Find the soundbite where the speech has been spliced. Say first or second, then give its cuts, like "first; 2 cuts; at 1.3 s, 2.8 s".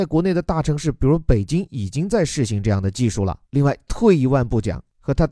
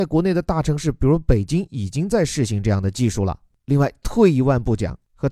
first; 1 cut; at 3.4 s